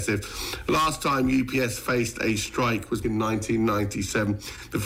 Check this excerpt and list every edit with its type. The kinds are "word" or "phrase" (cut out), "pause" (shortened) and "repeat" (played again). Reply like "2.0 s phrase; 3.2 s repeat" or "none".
3.0 s word